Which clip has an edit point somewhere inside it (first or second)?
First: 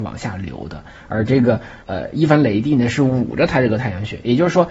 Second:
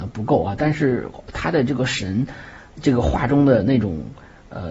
first